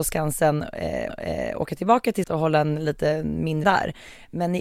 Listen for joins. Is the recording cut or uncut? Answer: cut